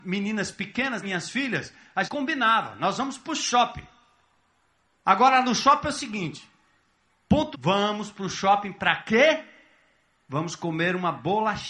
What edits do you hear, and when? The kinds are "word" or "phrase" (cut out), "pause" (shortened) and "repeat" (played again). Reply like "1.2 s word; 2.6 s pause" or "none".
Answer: 1.0 s word; 2.0 s word; 7.5 s word